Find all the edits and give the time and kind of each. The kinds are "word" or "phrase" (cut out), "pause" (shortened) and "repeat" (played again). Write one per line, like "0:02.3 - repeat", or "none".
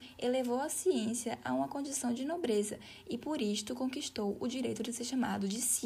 none